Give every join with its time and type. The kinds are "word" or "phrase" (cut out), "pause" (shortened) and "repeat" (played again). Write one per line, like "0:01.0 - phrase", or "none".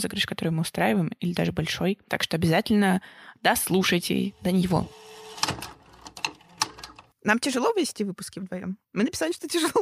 0:08.8 - pause